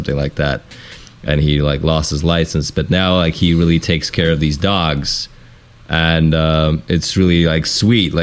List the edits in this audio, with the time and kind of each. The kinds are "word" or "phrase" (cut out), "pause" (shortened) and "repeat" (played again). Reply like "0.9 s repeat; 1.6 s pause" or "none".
none